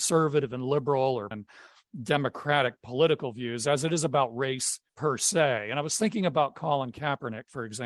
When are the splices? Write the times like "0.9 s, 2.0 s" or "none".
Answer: 1.3 s, 4.9 s